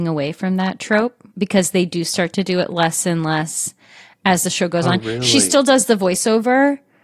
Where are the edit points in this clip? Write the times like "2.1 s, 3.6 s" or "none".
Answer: 1.3 s